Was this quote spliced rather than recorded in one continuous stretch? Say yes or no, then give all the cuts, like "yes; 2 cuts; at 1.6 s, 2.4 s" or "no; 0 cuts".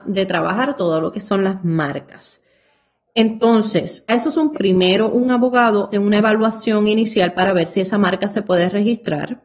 yes; 3 cuts; at 4.1 s, 4.5 s, 5.9 s